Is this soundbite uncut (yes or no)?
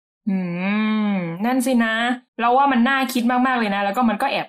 no